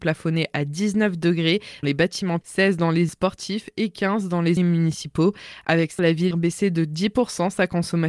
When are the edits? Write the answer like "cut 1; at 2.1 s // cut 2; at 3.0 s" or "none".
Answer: cut 1; at 1.8 s // cut 2; at 2.4 s // cut 3; at 3.1 s // cut 4; at 4.6 s // cut 5; at 6.0 s // cut 6; at 6.3 s